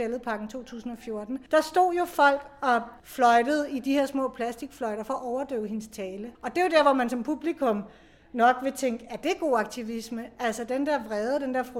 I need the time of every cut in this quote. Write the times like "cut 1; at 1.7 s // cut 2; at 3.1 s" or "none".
cut 1; at 1.5 s // cut 2; at 3.0 s // cut 3; at 6.3 s